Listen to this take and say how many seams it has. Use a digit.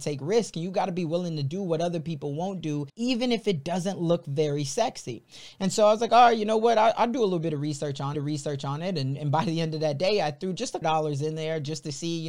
3